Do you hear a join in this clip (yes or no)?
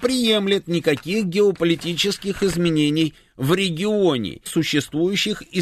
yes